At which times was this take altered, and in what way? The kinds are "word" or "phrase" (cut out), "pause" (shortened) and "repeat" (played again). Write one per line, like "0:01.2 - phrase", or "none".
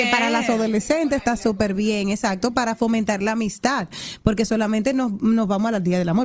none